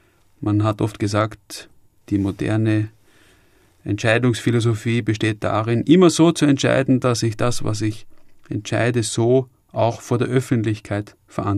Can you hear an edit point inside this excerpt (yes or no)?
no